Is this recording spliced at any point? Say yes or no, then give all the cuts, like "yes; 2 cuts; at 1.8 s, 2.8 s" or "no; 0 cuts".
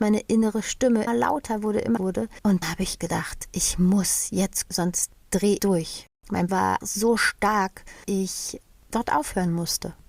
yes; 9 cuts; at 1.1 s, 2.0 s, 2.6 s, 3.0 s, 4.7 s, 5.6 s, 6.5 s, 6.8 s, 8.0 s